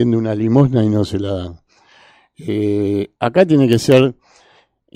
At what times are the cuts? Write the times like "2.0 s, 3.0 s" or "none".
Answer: none